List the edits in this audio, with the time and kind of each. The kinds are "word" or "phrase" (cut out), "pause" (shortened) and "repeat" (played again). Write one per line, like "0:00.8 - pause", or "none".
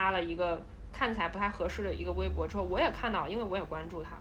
none